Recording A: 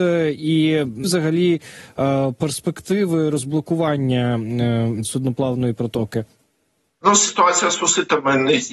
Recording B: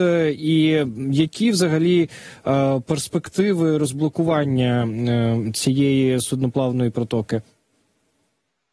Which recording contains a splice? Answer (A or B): A